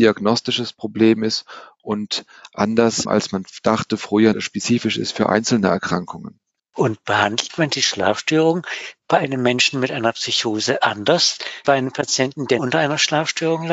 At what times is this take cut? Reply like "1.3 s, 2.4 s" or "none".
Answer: 3.1 s, 4.3 s, 6.6 s, 11.6 s, 12.6 s

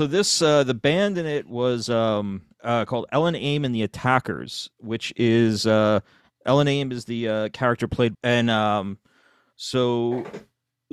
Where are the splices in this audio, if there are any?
2.5 s, 8.1 s

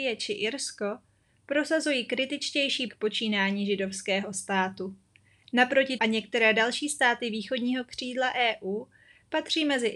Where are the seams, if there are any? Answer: 2.9 s, 6.0 s

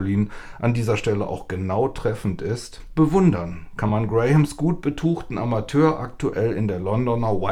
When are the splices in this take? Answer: none

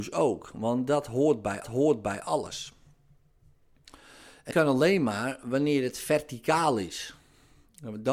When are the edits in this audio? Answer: 1.6 s, 4.5 s

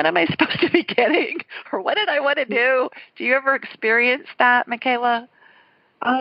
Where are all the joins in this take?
none

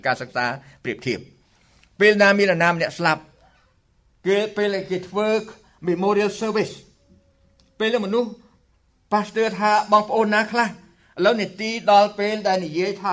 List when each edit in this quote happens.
none

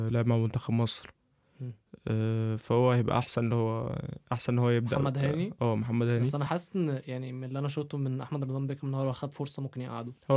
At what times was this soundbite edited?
none

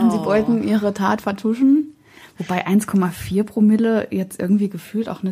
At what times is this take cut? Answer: none

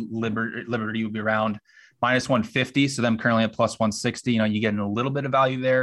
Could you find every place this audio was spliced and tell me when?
none

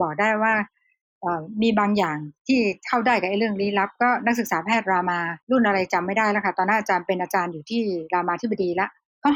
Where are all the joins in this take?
5.4 s

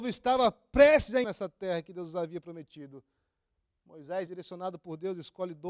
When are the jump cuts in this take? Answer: 1.2 s, 4.3 s

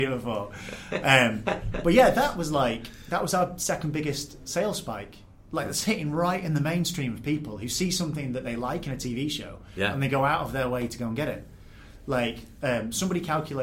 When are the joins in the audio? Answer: none

